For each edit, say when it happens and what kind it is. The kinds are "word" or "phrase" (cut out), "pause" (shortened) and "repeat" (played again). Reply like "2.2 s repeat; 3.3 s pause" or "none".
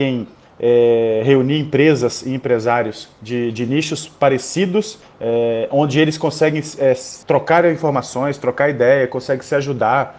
7.2 s pause